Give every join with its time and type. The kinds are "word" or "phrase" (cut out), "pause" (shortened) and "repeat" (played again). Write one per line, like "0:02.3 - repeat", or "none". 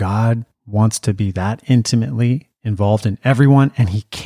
none